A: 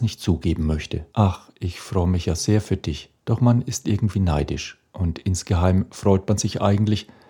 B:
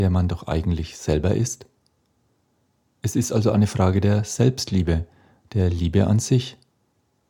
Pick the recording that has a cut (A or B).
A